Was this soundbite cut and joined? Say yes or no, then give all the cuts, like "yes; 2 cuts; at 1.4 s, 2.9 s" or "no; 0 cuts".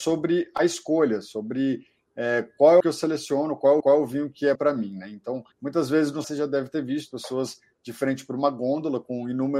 yes; 6 cuts; at 2.8 s, 3.8 s, 4.6 s, 5.5 s, 6.2 s, 7.1 s